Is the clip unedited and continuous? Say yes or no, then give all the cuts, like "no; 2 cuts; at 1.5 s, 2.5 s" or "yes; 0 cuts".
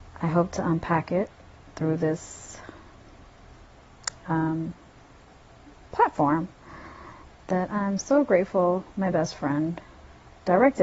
yes; 0 cuts